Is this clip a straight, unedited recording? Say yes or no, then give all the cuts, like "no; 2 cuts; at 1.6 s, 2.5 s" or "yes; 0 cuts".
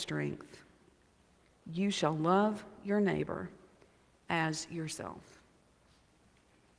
yes; 0 cuts